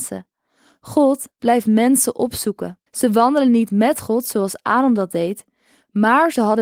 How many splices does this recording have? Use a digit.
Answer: 1